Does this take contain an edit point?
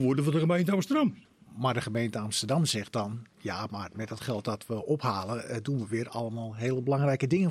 no; 0 cuts

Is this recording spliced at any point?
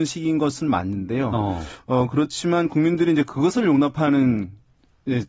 no; 0 cuts

